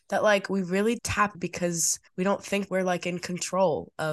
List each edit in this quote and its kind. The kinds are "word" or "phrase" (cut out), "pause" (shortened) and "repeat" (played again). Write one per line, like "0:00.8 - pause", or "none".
0:01.0 - word
0:01.3 - word
0:02.1 - pause
0:02.7 - word